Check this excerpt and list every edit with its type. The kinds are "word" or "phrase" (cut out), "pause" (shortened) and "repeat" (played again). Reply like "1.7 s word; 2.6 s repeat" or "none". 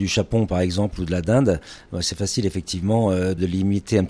none